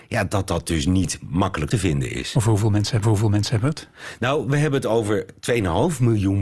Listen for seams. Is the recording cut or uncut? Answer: cut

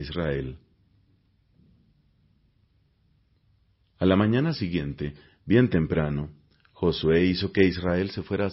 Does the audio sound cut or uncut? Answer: uncut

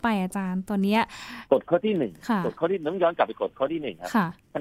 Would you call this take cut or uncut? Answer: cut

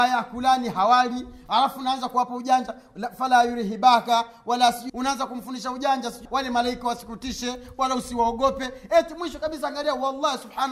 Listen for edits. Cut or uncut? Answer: cut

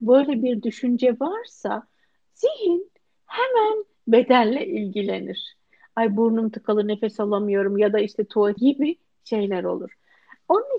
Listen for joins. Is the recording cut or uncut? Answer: cut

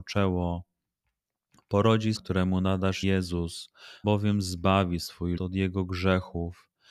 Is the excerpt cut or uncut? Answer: cut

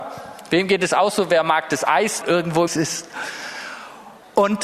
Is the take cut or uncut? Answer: cut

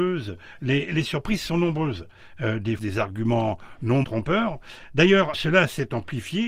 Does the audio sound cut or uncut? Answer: cut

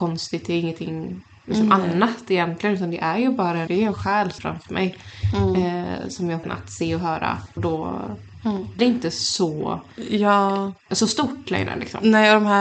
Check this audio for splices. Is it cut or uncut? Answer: cut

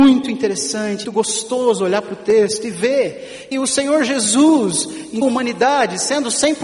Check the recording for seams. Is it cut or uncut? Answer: cut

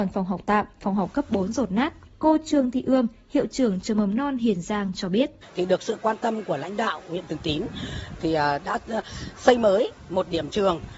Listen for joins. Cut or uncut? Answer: uncut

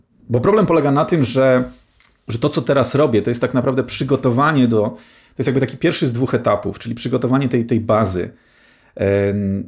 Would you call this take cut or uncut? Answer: uncut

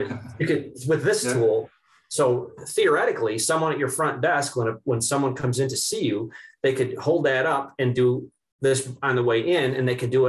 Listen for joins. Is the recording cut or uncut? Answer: uncut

